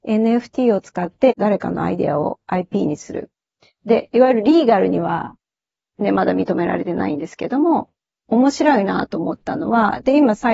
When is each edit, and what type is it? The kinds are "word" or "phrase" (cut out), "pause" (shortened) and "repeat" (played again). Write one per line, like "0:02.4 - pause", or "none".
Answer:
none